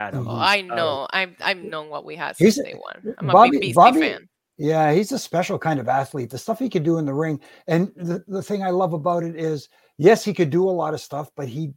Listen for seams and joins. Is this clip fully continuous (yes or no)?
yes